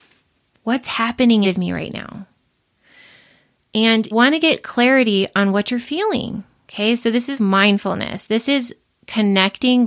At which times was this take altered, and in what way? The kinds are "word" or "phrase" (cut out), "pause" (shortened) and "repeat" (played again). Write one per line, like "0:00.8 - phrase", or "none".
0:01.4 - word
0:04.1 - word
0:07.3 - word